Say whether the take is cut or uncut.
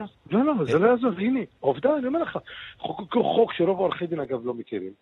uncut